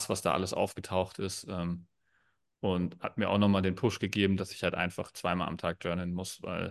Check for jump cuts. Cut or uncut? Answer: uncut